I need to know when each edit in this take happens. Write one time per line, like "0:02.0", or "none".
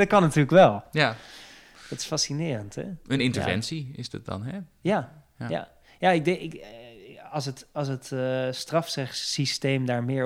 none